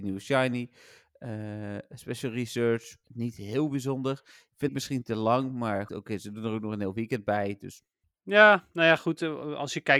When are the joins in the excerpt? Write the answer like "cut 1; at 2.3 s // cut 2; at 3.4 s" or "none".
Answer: cut 1; at 3.0 s // cut 2; at 4.7 s // cut 3; at 5.9 s // cut 4; at 8.0 s